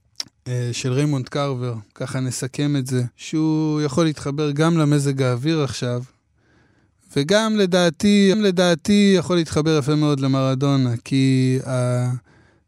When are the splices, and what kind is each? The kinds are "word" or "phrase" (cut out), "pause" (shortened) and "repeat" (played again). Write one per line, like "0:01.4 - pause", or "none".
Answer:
0:01.9 - pause
0:03.1 - pause
0:08.3 - repeat